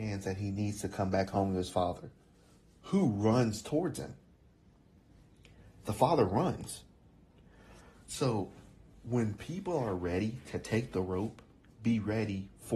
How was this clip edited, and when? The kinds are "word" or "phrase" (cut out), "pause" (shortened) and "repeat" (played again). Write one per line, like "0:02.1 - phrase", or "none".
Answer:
none